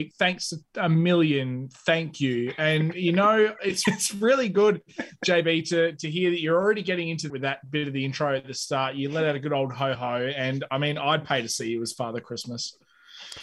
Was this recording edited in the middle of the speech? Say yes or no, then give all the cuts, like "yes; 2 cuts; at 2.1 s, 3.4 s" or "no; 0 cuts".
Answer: yes; 3 cuts; at 3.8 s, 7.3 s, 9.9 s